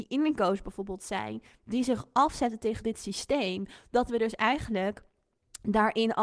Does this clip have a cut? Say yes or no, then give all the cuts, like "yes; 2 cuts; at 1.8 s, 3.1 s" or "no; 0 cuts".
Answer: no; 0 cuts